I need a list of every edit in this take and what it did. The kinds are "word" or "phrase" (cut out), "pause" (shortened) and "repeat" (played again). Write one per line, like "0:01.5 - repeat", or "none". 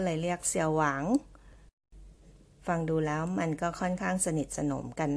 none